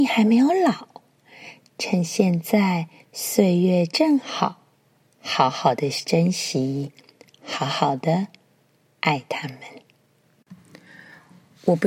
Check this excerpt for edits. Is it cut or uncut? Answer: uncut